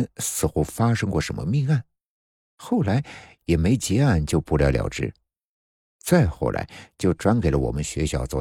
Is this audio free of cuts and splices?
yes; 0 cuts

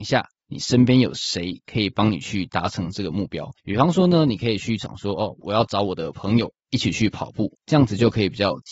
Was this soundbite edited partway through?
yes; 2 cuts; at 3.6 s, 7.6 s

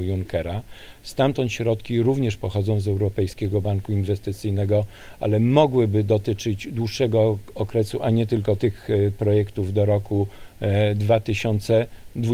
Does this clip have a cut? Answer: yes; 1 cut; at 8.6 s

